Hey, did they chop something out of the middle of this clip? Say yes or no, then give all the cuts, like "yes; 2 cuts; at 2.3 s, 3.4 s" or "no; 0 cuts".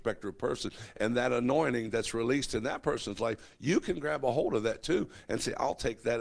no; 0 cuts